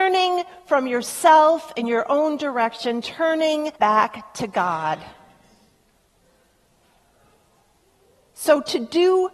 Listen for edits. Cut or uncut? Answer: cut